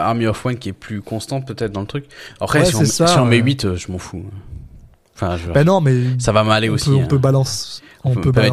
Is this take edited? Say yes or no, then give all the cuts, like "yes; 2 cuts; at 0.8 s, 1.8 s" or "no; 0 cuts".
no; 0 cuts